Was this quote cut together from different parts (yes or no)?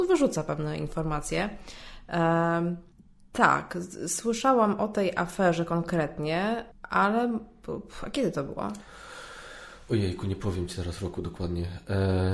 yes